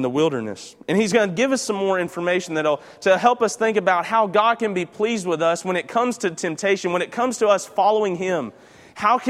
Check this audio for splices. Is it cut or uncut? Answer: uncut